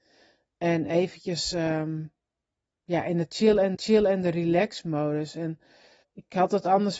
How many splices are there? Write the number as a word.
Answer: two